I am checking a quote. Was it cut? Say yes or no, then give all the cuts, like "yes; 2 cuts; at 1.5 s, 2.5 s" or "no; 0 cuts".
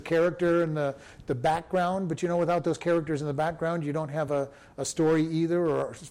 no; 0 cuts